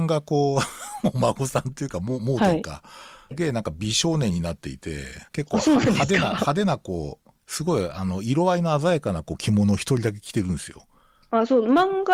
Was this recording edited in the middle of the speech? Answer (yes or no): yes